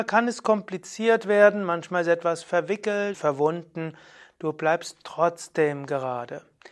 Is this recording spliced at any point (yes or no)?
yes